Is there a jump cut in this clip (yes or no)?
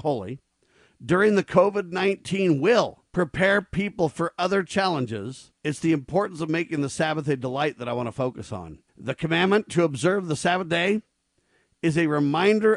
yes